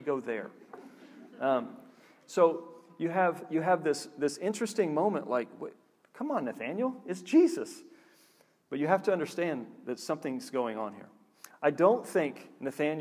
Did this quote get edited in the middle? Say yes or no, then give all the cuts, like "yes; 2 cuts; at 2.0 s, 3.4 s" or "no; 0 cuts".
no; 0 cuts